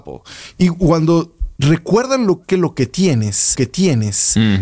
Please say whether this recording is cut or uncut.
cut